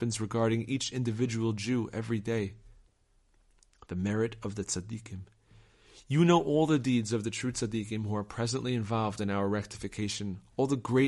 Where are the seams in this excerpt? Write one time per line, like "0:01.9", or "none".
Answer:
none